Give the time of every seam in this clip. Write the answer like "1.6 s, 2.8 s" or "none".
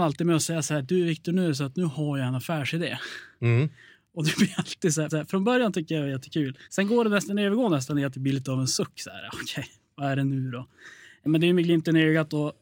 5.1 s, 6.6 s